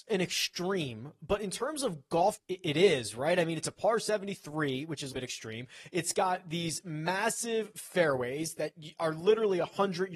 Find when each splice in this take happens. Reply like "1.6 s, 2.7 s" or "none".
2.4 s, 5.1 s